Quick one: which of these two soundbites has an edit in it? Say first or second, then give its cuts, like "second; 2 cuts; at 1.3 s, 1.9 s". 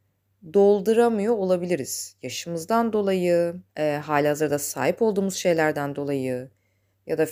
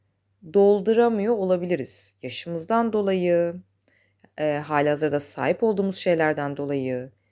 first; 1 cut; at 3.7 s